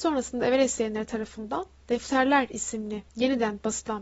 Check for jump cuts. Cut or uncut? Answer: cut